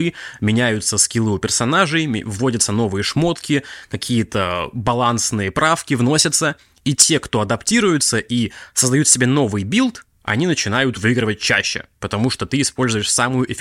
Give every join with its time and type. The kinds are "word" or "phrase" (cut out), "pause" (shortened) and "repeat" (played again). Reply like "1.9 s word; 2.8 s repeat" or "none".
none